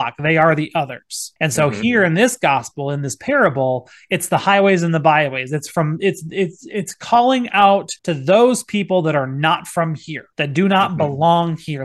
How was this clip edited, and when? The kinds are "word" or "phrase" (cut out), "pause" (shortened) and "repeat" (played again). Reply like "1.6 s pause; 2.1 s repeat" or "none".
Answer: 1.4 s pause; 8.0 s pause; 10.3 s pause